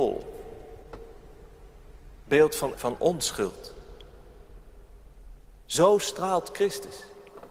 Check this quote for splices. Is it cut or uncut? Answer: cut